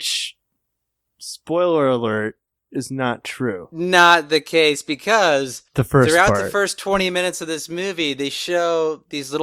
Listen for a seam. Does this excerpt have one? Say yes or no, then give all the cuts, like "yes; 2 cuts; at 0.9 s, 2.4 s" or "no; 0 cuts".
yes; 2 cuts; at 2.5 s, 5.7 s